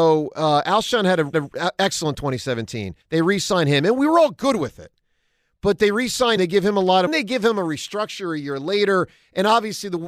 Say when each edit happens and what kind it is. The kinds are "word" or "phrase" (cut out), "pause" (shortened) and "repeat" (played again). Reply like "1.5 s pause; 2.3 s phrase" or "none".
1.3 s repeat; 3.0 s pause; 6.4 s word; 7.1 s phrase